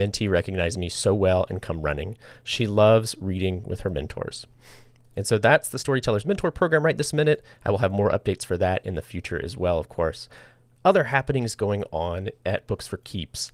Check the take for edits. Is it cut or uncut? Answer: uncut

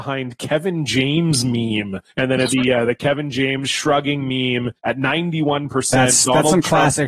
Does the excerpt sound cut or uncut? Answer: cut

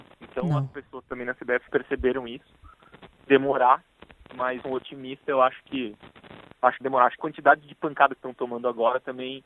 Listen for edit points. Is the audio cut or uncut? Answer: cut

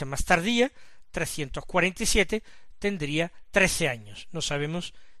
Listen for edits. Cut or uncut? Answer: uncut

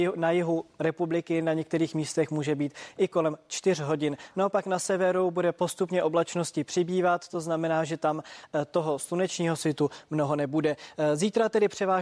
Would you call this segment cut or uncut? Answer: uncut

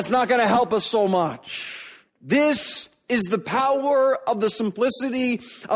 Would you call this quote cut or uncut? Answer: cut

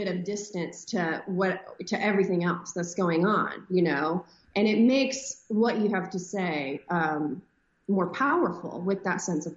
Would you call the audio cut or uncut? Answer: uncut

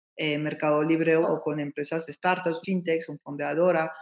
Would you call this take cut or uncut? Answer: cut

